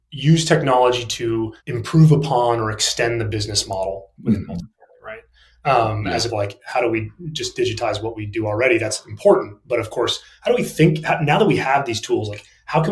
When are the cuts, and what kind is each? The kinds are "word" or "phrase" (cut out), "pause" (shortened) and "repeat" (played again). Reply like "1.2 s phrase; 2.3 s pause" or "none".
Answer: 1.6 s pause; 4.2 s word; 6.3 s phrase